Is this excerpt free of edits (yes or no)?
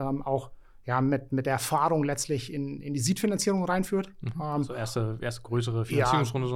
yes